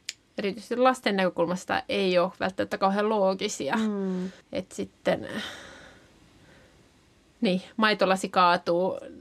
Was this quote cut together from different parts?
yes; 1 cut; at 4.4 s

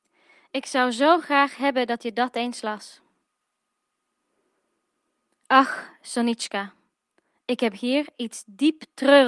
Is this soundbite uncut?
yes; 0 cuts

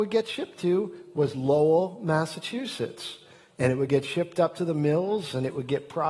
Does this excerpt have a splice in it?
no; 0 cuts

